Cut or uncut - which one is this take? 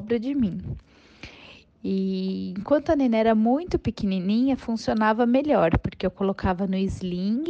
uncut